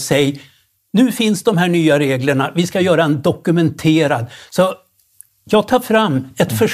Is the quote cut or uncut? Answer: uncut